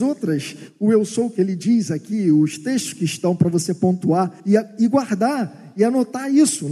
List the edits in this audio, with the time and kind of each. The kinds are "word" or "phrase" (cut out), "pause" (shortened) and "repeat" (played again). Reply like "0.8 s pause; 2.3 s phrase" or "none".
4.4 s pause